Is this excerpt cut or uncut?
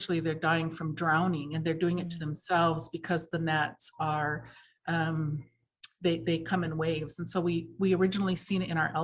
uncut